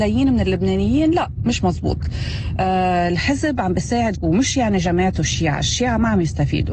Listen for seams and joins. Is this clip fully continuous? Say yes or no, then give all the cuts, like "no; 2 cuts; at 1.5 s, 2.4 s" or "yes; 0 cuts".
no; 1 cut; at 4.1 s